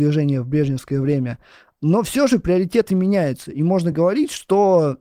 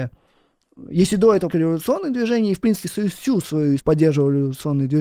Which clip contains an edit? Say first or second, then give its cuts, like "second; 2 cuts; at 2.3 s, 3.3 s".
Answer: second; 3 cuts; at 1.5 s, 2.8 s, 3.8 s